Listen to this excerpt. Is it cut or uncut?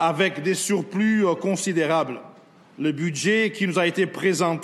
uncut